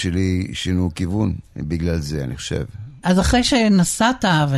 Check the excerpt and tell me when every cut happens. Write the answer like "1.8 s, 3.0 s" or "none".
1.5 s